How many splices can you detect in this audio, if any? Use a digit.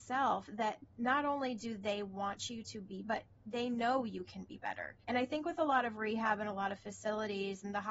2